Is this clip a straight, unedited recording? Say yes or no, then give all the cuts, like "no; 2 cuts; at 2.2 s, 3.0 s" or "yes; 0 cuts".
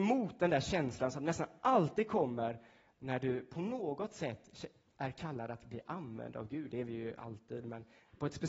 yes; 0 cuts